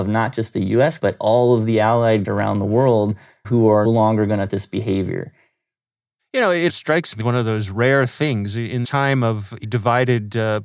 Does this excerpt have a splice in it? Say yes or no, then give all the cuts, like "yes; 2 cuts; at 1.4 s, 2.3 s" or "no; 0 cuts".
yes; 9 cuts; at 1.0 s, 2.2 s, 3.4 s, 3.8 s, 4.5 s, 6.7 s, 7.2 s, 8.8 s, 9.6 s